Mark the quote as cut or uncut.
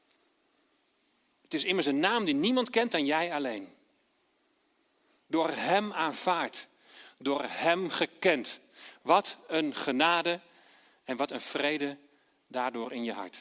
uncut